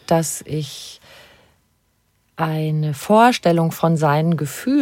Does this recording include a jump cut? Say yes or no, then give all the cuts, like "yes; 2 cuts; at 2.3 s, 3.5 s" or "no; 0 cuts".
no; 0 cuts